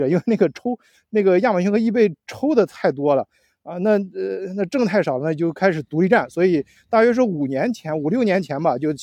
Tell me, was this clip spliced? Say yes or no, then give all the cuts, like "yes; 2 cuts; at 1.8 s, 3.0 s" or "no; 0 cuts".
no; 0 cuts